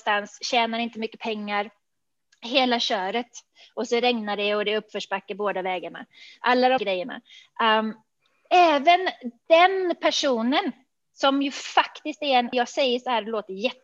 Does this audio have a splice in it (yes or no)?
yes